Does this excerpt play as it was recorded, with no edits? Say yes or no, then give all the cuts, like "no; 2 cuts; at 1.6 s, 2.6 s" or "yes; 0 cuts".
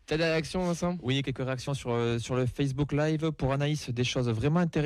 yes; 0 cuts